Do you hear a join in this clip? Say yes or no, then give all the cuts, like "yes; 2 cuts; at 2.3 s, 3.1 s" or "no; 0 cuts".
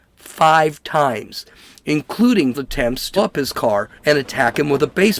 yes; 3 cuts; at 2.5 s, 3.2 s, 4.0 s